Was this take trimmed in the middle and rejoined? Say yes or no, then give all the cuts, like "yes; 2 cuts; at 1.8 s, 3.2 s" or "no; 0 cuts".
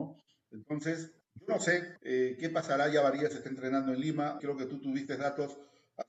yes; 3 cuts; at 1.2 s, 2.0 s, 4.4 s